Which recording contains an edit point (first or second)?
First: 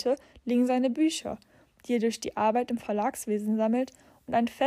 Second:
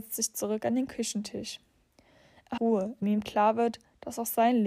second